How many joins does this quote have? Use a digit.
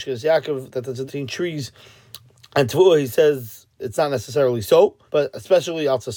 4